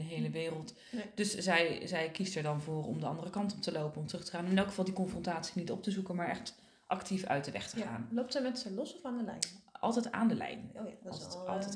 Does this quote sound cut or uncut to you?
uncut